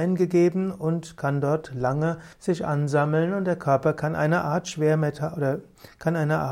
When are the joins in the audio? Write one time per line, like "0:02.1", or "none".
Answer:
0:02.3